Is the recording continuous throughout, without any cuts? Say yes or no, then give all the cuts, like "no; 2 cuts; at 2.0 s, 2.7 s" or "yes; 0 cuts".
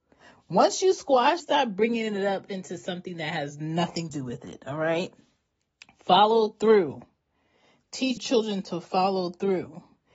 no; 3 cuts; at 1.4 s, 4.1 s, 8.2 s